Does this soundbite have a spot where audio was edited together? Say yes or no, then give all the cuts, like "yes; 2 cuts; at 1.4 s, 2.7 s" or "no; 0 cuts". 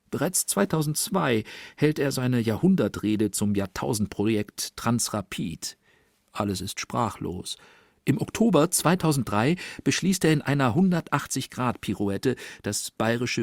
no; 0 cuts